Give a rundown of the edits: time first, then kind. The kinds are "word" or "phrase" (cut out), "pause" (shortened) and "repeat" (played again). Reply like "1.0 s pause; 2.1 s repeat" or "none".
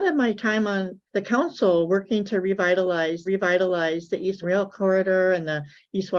1.1 s pause; 3.3 s repeat; 4.4 s word